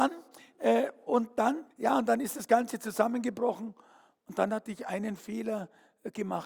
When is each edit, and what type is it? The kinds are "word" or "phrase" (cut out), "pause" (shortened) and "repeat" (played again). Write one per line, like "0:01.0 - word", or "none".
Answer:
0:01.7 - pause